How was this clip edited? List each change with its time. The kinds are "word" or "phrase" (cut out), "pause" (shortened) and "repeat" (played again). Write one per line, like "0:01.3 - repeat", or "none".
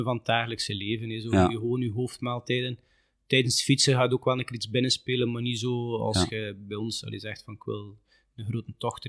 none